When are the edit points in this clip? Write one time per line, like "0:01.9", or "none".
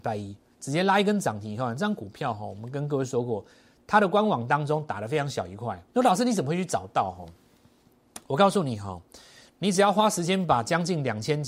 0:05.9
0:08.2